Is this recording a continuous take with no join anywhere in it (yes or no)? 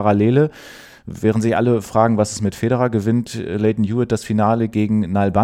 yes